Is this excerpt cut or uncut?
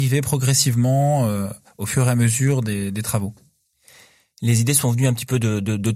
uncut